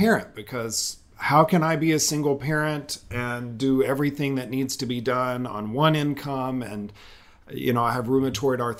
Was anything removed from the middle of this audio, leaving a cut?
no; 0 cuts

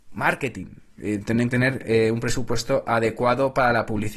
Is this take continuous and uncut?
no; 1 cut; at 1.5 s

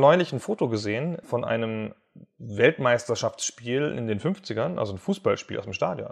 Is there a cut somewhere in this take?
no; 0 cuts

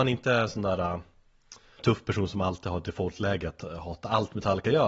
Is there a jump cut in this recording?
yes; 1 cut; at 1.8 s

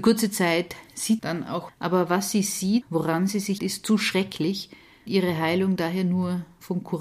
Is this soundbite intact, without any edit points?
no; 5 cuts; at 1.2 s, 1.7 s, 2.8 s, 3.6 s, 5.1 s

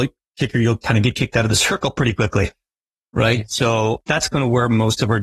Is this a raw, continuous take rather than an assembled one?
yes; 0 cuts

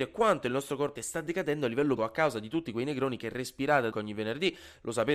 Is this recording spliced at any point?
yes; 3 cuts; at 1.0 s, 2.0 s, 3.9 s

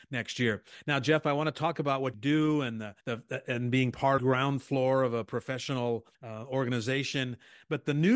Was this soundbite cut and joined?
yes; 4 cuts; at 2.1 s, 3.0 s, 4.2 s, 6.1 s

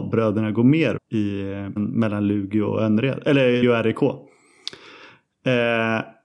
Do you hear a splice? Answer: yes; 3 cuts; at 1.0 s, 1.8 s, 3.6 s

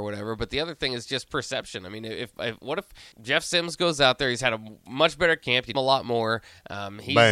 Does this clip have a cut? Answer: yes; 2 cuts; at 3.1 s, 5.7 s

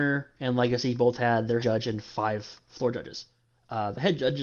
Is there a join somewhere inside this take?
yes; 1 cut; at 1.6 s

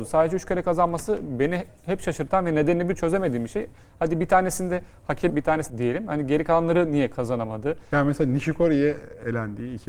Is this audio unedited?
no; 3 cuts; at 3.0 s, 5.3 s, 5.7 s

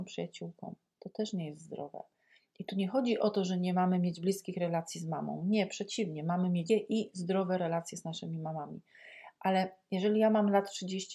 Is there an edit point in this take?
yes; 1 cut; at 6.7 s

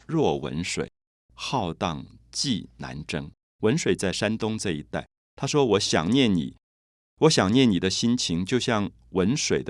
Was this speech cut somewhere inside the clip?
no; 0 cuts

